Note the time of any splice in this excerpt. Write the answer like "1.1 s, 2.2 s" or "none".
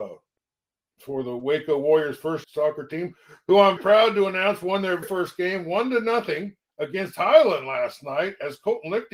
2.4 s, 3.8 s, 5.0 s, 6.6 s